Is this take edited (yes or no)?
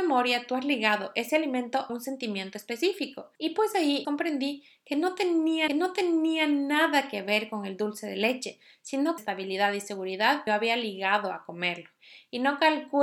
yes